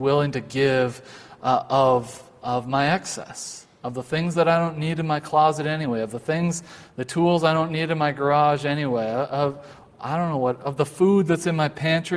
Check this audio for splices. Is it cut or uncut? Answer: uncut